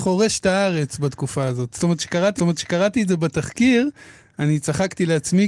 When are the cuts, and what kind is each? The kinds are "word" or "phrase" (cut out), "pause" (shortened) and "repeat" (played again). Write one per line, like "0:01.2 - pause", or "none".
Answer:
0:02.4 - repeat